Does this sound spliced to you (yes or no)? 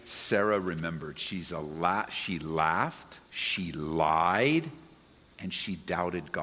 yes